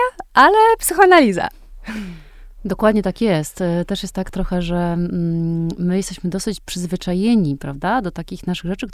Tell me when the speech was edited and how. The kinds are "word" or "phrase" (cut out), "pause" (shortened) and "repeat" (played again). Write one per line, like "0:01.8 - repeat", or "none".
none